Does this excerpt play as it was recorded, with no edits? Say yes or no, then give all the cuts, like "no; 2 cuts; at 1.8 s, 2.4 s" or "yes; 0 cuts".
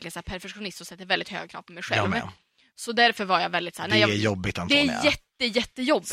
yes; 0 cuts